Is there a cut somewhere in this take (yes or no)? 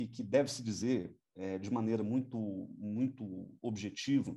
no